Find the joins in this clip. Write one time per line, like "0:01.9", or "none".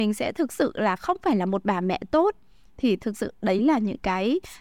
none